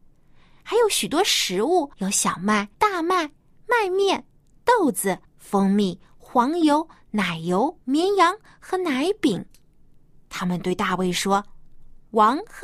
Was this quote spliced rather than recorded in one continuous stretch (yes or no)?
yes